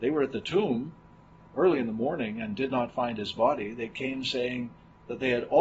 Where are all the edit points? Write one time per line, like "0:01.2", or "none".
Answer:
none